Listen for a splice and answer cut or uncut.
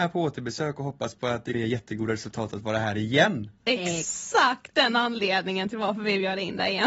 cut